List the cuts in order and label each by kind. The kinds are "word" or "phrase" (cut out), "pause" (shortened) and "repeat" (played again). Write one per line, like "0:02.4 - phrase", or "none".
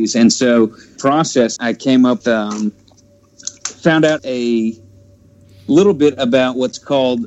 0:01.0 - phrase
0:01.6 - word
0:02.2 - word
0:04.2 - word